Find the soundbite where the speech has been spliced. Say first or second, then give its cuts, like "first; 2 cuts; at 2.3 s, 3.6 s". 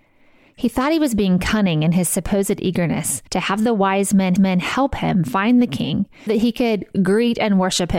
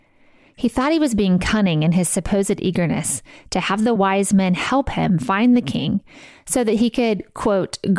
first; 4 cuts; at 3.3 s, 4.4 s, 6.3 s, 6.9 s